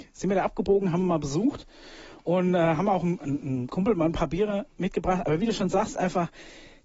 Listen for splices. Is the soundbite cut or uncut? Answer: uncut